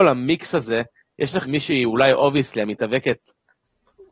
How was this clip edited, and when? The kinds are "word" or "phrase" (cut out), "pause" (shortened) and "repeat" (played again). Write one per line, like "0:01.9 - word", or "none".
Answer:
0:01.4 - word

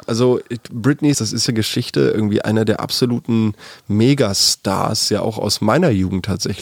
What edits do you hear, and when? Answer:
0:01.1 - word
0:01.5 - phrase

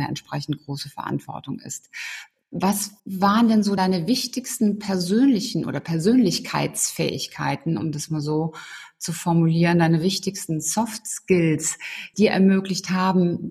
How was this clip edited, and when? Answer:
0:03.0 - pause
0:03.8 - word
0:12.1 - phrase

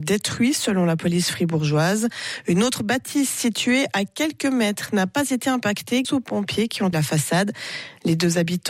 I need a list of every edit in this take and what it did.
0:06.0 - word
0:06.9 - word

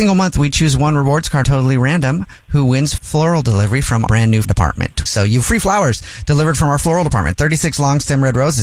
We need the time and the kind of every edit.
0:01.4 - word
0:03.0 - word
0:04.1 - word
0:04.4 - word
0:05.4 - word

